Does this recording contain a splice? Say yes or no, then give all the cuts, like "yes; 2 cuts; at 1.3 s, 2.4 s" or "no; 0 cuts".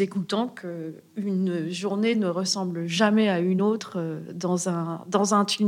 no; 0 cuts